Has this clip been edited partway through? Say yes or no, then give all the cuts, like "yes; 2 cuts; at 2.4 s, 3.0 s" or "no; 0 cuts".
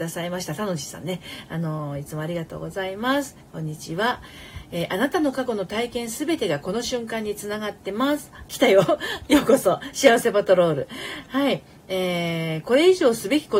no; 0 cuts